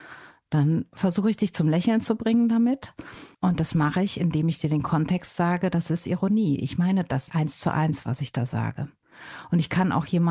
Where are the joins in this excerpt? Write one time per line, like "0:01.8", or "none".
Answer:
0:03.3
0:07.3